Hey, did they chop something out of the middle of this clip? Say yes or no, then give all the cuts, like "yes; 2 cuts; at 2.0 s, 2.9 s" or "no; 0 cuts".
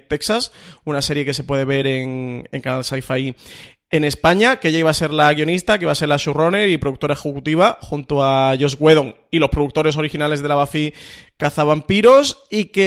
no; 0 cuts